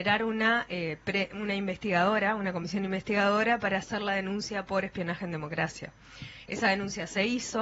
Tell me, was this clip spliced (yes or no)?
no